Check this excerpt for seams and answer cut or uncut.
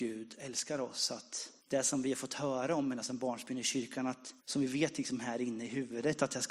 cut